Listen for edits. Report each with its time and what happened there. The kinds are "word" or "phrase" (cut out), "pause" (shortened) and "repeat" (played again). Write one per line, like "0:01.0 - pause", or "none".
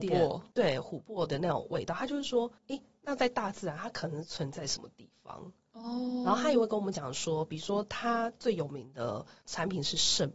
0:02.6 - pause